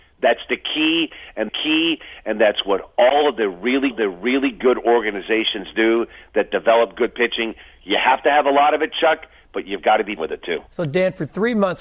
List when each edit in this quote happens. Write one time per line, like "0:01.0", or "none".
0:01.5
0:03.9
0:10.2
0:10.7